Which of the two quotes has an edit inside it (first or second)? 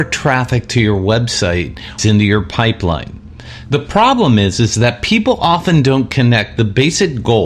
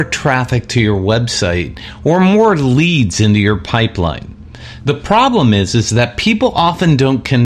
first